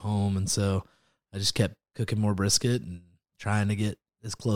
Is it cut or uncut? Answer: uncut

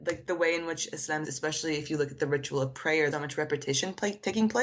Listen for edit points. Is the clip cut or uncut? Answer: cut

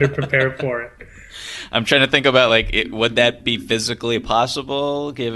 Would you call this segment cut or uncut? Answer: uncut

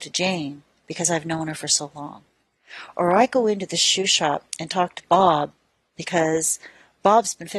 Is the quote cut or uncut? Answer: uncut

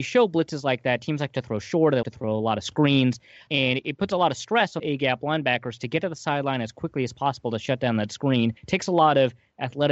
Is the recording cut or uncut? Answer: cut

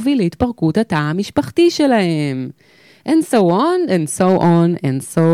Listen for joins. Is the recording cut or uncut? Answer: uncut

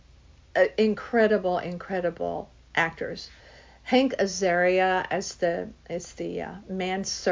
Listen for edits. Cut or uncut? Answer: uncut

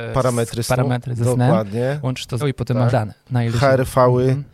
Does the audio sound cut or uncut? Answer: cut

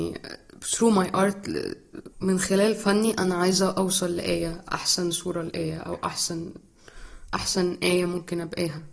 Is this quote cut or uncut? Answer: cut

